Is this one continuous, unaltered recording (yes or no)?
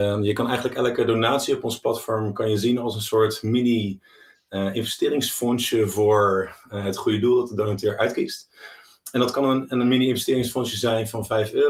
yes